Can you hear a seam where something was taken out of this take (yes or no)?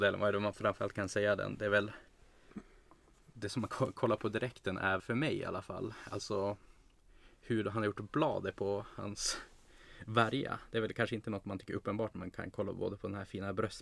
yes